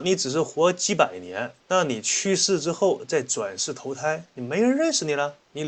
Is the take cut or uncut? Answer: cut